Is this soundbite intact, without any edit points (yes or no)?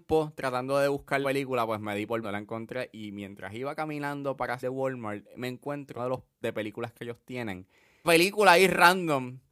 no